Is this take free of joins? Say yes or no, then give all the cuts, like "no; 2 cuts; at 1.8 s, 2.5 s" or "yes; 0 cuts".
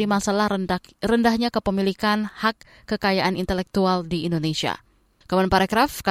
yes; 0 cuts